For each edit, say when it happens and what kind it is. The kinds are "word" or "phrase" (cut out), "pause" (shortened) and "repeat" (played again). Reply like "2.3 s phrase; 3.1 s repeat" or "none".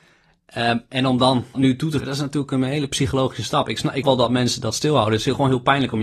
1.5 s word; 2.0 s word; 4.0 s word